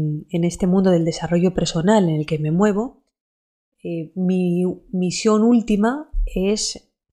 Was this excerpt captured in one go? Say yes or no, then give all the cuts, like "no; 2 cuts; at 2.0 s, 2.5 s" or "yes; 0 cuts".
yes; 0 cuts